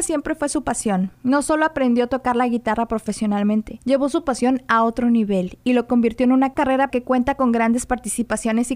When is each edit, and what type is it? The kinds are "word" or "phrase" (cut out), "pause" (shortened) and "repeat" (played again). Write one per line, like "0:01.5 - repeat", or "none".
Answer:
0:06.9 - word